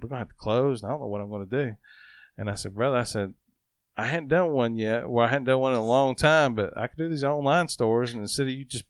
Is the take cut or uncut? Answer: uncut